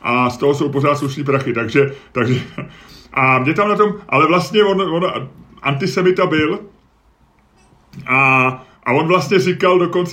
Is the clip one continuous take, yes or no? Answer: yes